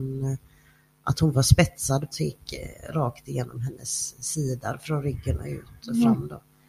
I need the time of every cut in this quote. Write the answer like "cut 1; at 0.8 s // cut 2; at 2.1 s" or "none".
cut 1; at 2.1 s